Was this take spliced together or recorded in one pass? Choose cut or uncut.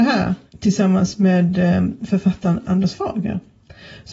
uncut